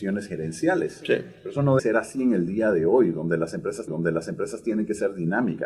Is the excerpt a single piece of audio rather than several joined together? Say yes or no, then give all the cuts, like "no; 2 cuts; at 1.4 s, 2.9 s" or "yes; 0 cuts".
no; 2 cuts; at 1.8 s, 3.9 s